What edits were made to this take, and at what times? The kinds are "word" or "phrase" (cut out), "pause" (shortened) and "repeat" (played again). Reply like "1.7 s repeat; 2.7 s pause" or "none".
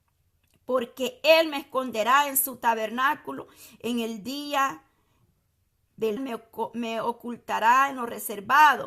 6.2 s word